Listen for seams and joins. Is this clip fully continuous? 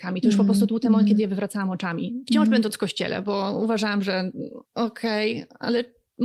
no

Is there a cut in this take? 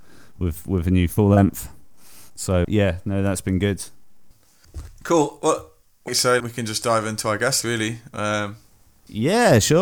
yes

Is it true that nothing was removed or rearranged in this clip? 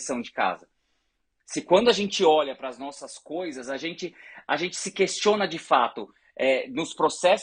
yes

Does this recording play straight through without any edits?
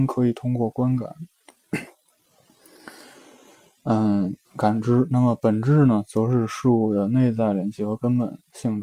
no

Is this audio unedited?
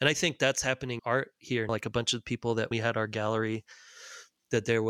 no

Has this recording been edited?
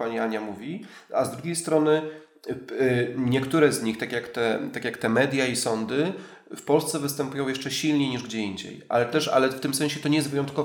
no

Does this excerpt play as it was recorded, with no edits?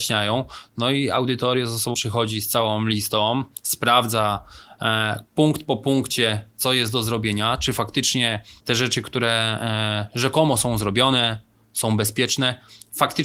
no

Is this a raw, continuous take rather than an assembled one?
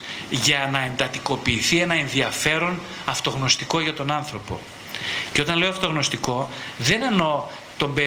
yes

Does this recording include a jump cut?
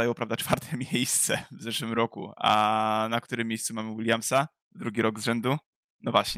no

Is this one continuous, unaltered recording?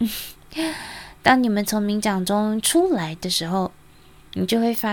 yes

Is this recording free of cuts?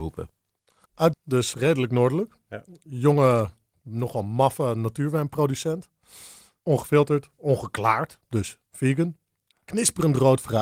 no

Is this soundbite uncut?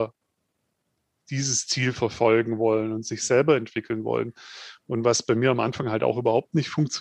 yes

